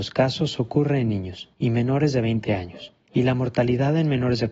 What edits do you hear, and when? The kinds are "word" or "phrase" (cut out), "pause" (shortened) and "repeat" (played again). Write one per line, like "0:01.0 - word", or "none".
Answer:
0:01.5 - pause
0:03.0 - pause